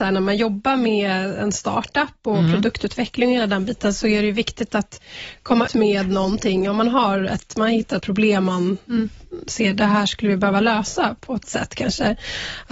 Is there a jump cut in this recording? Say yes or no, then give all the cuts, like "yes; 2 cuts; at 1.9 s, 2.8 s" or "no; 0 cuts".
yes; 3 cuts; at 5.7 s, 8.0 s, 11.4 s